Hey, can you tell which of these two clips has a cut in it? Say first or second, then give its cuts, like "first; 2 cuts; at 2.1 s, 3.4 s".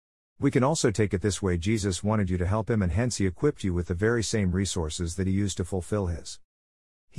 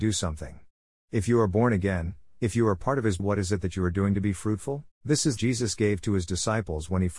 second; 3 cuts; at 3.2 s, 4.9 s, 5.4 s